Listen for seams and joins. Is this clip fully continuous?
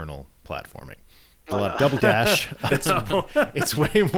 no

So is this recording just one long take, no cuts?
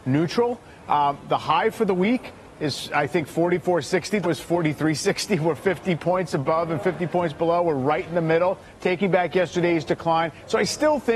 no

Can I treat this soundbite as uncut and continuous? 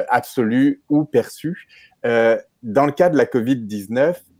yes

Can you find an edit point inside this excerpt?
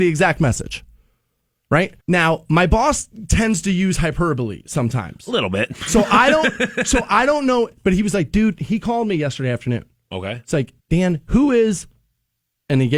yes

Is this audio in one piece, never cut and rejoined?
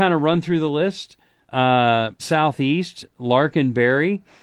no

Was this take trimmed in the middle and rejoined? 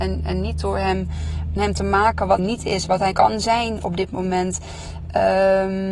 yes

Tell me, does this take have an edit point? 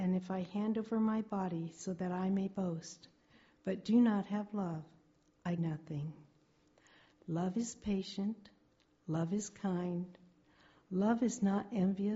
yes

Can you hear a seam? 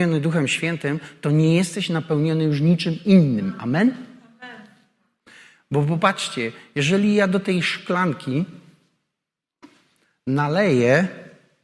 no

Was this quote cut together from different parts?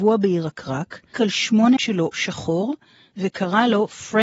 yes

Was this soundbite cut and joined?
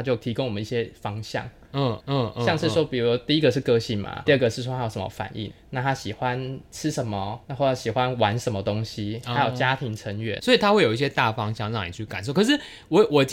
yes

